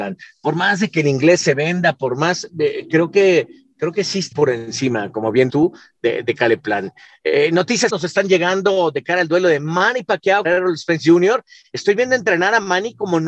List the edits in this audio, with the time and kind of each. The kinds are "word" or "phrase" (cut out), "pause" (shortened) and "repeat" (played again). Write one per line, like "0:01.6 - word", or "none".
0:04.3 - word
0:05.5 - word
0:07.9 - word
0:10.4 - word